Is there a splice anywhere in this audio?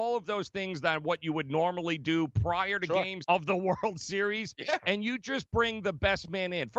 yes; 1 cut; at 3.2 s

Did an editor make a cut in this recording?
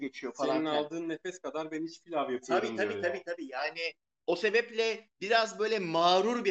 no; 0 cuts

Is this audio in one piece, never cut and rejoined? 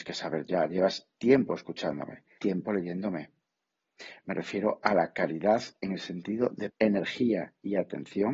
no; 2 cuts; at 2.4 s, 6.7 s

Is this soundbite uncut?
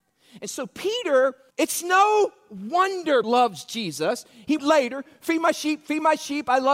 no; 3 cuts; at 1.5 s, 3.2 s, 4.6 s

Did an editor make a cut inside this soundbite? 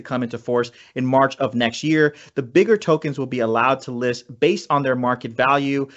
no; 0 cuts

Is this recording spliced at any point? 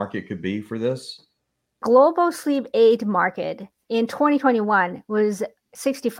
no; 0 cuts

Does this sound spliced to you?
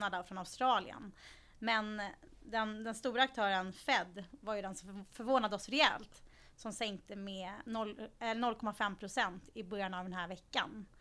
no; 0 cuts

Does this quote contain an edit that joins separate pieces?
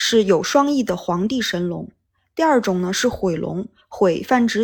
no; 0 cuts

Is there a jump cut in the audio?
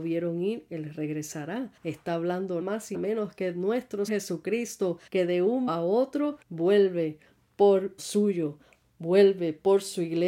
yes; 8 cuts; at 1.8 s, 2.6 s, 2.9 s, 4.1 s, 5.1 s, 5.7 s, 6.4 s, 8.0 s

